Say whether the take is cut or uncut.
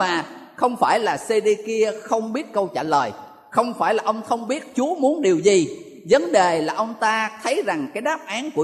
uncut